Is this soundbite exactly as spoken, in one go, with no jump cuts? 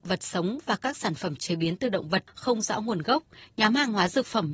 yes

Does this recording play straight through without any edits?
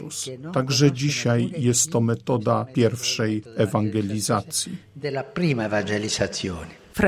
yes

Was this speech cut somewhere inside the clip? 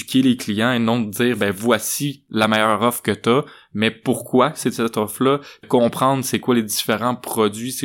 yes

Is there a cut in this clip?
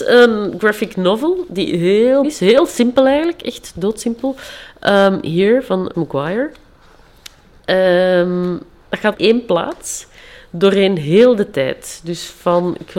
yes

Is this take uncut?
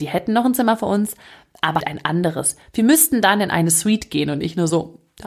no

